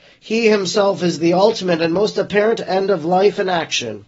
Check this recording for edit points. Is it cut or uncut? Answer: uncut